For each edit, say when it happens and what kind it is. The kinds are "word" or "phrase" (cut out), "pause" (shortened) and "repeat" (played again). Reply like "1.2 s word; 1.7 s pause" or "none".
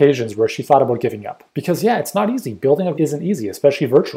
1.5 s pause; 2.9 s phrase